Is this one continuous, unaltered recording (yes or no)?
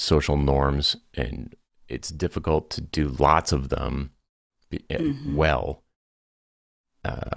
yes